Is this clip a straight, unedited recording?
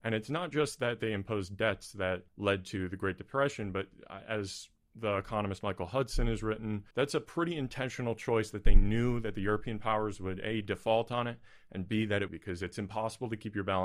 no; 3 cuts; at 2.3 s, 6.9 s, 12.3 s

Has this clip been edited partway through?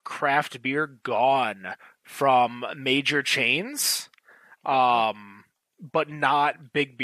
no; 0 cuts

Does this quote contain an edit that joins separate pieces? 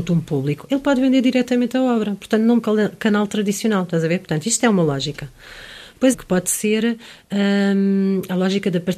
yes; 2 cuts; at 2.6 s, 6.1 s

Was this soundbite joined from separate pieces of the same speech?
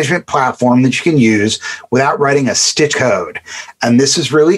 yes; 1 cut; at 2.9 s

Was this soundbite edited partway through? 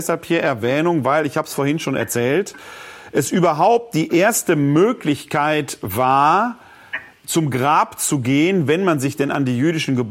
no; 0 cuts

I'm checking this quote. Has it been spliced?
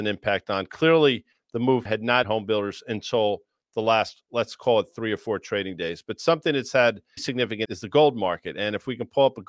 yes; 4 cuts; at 1.9 s, 2.2 s, 7.2 s, 7.7 s

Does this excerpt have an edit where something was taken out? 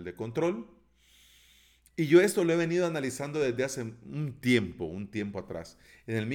no; 0 cuts

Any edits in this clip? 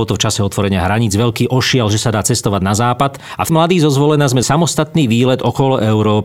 yes; 2 cuts; at 3.5 s, 4.4 s

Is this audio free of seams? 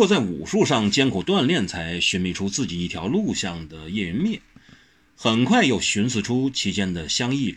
yes; 0 cuts

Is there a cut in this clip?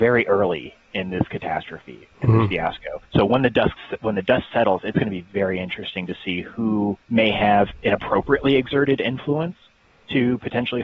yes; 2 cuts; at 3.0 s, 7.0 s

